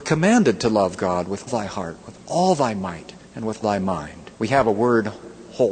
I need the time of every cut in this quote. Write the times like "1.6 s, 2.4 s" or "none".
1.5 s, 3.2 s, 3.6 s, 4.4 s

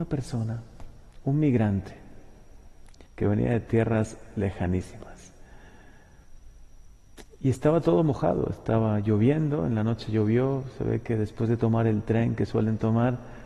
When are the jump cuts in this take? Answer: 3.1 s

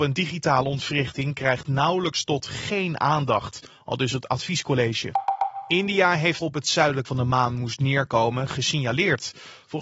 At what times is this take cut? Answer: 6.4 s, 7.0 s

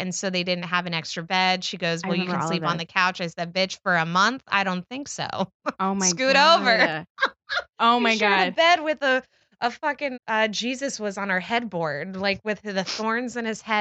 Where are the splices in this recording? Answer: 10.1 s

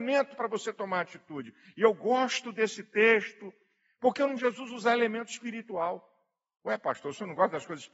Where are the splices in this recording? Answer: 4.4 s

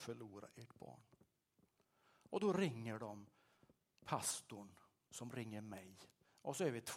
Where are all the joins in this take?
none

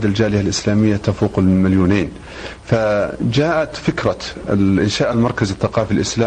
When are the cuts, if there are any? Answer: none

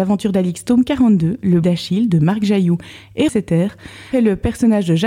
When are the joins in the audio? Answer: 1.6 s, 3.3 s, 4.1 s

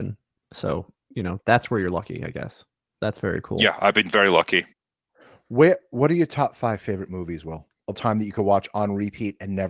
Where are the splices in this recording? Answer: 3.0 s, 7.9 s

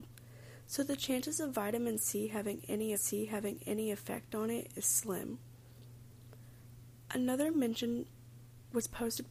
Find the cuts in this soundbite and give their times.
2.9 s, 7.5 s

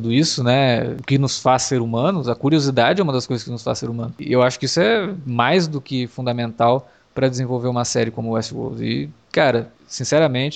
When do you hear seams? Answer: none

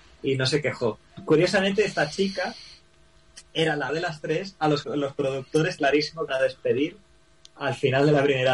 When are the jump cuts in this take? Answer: 3.9 s, 4.8 s, 5.8 s, 6.3 s

